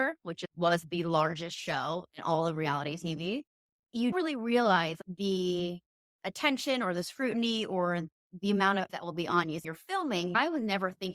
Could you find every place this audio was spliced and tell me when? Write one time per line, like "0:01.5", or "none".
0:04.1
0:08.9
0:09.6